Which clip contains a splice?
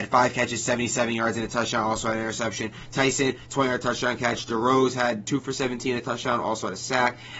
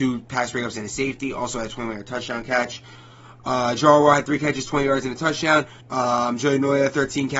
second; 1 cut; at 5.8 s

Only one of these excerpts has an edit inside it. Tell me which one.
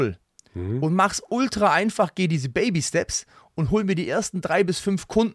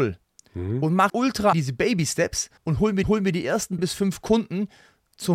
second; 5 cuts; at 1.1 s, 1.5 s, 2.6 s, 3.0 s, 3.8 s

